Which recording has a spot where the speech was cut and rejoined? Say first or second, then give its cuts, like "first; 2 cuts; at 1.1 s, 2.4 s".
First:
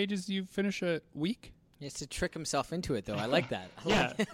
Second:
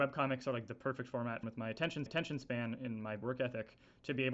second; 3 cuts; at 1.4 s, 2.1 s, 3.2 s